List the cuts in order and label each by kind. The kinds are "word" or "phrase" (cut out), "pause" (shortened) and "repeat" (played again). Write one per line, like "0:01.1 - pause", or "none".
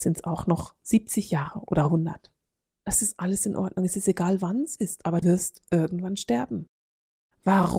0:05.2 - word